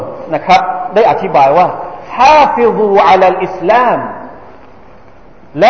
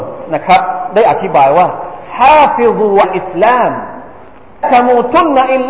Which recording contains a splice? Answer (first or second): second